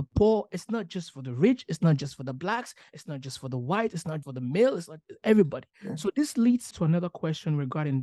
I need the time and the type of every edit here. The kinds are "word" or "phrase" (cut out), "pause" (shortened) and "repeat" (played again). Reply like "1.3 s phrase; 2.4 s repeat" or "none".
4.2 s word; 5.7 s pause; 6.7 s word